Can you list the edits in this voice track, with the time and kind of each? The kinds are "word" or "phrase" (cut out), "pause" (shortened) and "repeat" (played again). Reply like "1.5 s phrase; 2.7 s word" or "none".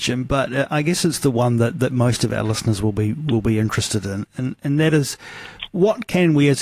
none